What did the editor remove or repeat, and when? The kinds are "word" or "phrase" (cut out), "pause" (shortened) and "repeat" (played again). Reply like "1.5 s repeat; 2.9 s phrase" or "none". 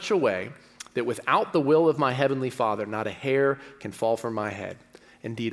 none